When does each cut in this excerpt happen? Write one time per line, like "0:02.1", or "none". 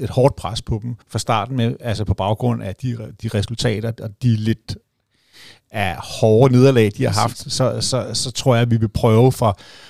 0:01.0

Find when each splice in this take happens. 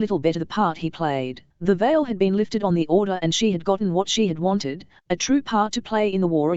0:01.5

